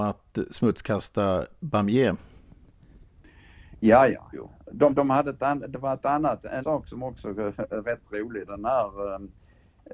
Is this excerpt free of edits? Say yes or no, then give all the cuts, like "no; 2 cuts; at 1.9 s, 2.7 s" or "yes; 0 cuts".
no; 5 cuts; at 4.3 s, 4.9 s, 6.6 s, 7.8 s, 8.5 s